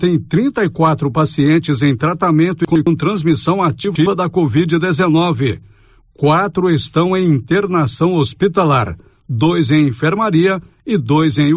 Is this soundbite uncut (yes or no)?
yes